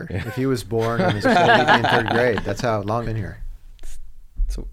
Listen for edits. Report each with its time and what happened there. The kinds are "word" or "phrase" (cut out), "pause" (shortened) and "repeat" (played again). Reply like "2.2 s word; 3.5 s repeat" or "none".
1.2 s word; 3.0 s word